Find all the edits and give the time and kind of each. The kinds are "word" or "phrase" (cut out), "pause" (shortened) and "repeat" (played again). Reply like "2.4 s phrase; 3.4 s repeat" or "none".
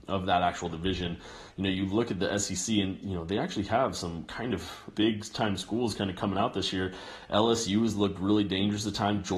4.9 s phrase